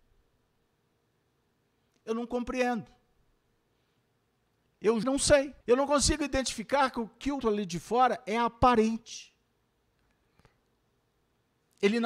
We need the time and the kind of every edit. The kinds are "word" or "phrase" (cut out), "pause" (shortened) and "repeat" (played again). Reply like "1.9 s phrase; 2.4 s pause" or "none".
5.0 s phrase; 5.6 s pause; 7.4 s word